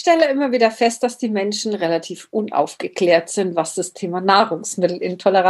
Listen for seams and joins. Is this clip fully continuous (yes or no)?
yes